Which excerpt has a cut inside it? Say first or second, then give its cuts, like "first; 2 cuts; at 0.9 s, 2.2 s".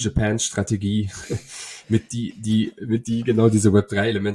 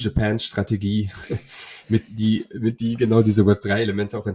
second; 1 cut; at 2.1 s